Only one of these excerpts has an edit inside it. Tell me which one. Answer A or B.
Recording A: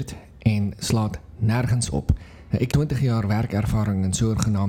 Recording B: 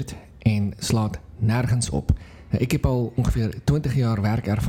A